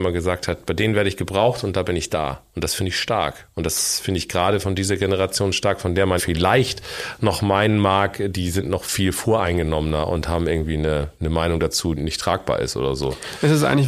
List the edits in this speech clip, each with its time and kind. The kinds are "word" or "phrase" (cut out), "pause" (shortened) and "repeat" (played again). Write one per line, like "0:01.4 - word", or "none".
0:06.2 - word
0:11.2 - pause
0:12.0 - word